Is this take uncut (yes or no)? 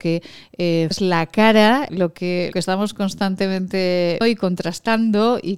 no